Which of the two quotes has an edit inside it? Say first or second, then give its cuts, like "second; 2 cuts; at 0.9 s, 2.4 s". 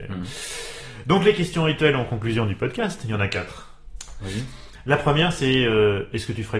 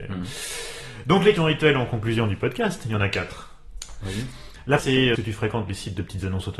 second; 3 cuts; at 1.4 s, 4.8 s, 5.1 s